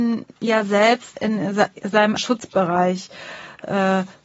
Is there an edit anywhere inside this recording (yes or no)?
yes